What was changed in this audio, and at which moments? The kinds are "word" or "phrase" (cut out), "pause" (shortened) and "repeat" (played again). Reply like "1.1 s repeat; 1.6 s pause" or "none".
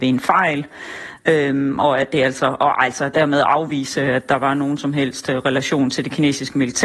none